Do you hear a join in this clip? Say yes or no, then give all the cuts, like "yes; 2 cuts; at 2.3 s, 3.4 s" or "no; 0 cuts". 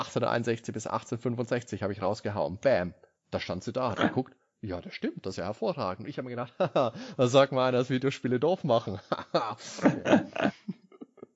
no; 0 cuts